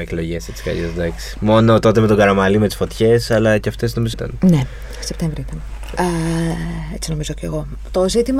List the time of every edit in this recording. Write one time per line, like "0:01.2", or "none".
0:04.1